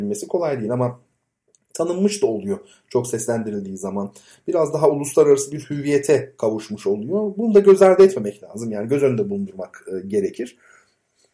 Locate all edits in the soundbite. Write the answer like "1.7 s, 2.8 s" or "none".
none